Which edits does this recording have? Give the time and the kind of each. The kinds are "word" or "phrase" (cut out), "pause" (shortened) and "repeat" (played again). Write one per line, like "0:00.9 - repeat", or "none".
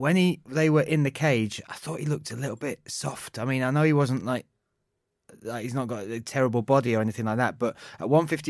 none